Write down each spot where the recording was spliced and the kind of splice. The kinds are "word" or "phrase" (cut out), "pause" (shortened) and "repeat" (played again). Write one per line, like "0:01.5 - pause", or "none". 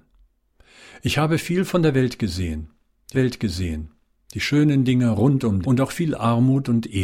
0:03.1 - repeat
0:05.6 - phrase